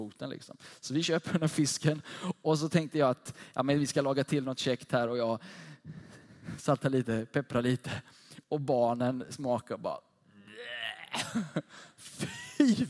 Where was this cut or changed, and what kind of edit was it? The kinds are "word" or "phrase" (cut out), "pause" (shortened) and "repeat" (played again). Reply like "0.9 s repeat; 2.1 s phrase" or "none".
8.4 s pause